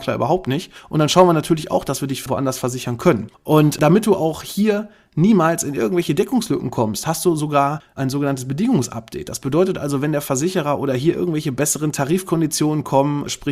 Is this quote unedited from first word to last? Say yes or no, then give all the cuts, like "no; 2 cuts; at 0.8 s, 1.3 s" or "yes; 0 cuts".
yes; 0 cuts